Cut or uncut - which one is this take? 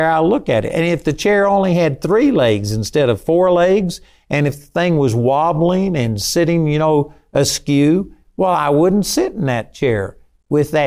uncut